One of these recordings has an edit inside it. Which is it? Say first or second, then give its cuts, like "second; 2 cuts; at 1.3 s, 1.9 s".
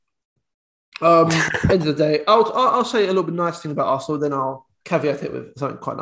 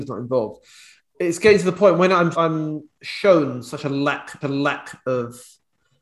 second; 3 cuts; at 1.0 s, 2.3 s, 4.4 s